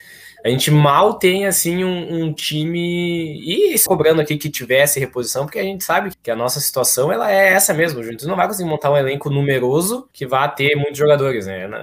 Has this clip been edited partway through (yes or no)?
yes